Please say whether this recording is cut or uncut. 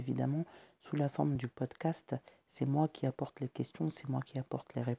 uncut